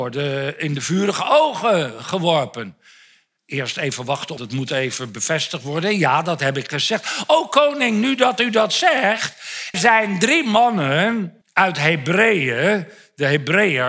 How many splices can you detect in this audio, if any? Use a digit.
3